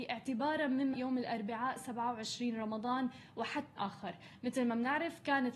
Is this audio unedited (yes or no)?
no